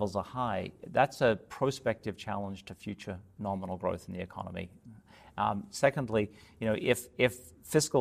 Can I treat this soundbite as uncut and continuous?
yes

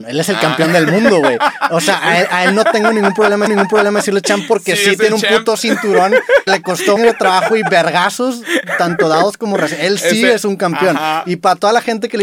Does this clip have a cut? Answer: yes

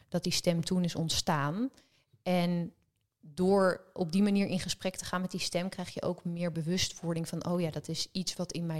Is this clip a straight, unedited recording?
yes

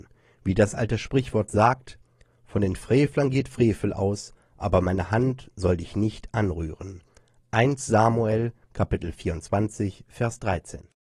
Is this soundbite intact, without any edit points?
yes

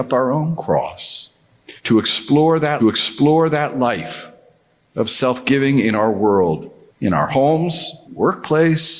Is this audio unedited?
no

